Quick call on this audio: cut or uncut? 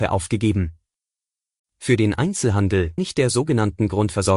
cut